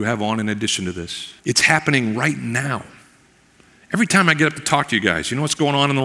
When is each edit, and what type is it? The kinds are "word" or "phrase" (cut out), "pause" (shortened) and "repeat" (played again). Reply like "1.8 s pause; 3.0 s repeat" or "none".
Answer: 1.4 s pause